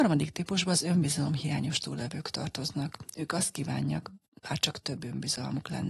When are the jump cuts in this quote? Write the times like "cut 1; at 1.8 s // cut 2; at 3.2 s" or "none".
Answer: none